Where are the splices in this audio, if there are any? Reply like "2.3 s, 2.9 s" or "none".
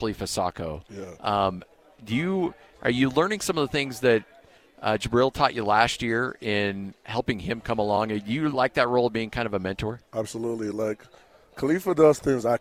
none